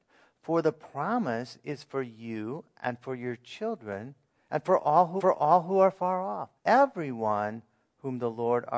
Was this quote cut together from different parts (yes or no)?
yes